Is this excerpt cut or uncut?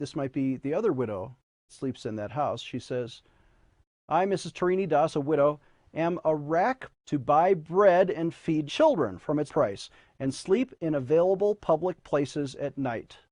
cut